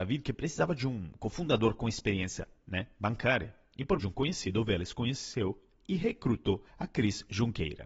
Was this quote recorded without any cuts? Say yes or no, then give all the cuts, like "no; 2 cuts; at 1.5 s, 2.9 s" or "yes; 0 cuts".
no; 2 cuts; at 4.0 s, 6.7 s